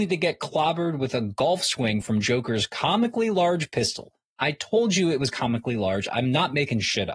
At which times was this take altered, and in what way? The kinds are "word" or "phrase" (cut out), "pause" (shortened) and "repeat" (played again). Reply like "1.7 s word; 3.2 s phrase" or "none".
none